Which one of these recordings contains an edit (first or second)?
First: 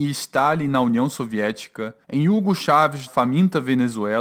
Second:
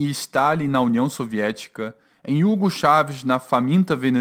first